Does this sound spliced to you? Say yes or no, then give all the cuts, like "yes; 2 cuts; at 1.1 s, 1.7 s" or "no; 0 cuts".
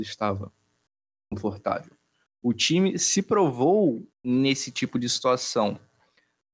yes; 1 cut; at 4.1 s